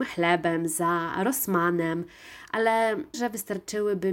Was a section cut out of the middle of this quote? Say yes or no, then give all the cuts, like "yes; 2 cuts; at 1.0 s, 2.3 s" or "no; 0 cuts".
yes; 1 cut; at 3.1 s